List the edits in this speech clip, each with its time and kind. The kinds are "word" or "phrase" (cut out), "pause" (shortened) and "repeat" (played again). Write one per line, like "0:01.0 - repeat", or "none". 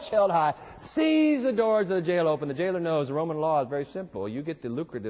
none